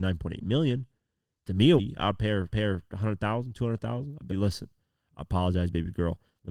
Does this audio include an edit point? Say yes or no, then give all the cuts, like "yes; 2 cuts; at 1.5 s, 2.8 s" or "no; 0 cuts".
yes; 3 cuts; at 1.8 s, 2.5 s, 4.3 s